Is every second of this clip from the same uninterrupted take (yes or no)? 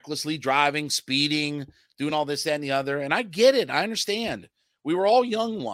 yes